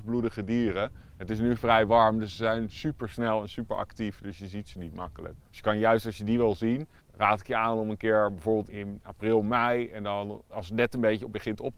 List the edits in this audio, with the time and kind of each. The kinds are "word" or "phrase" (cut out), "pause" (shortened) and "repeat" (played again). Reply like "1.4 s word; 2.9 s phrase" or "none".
5.4 s pause; 7.0 s pause; 8.7 s word; 10.5 s word